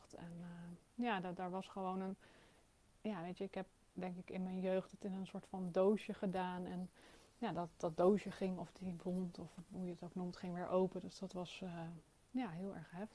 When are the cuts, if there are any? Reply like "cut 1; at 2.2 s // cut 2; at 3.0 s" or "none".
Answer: none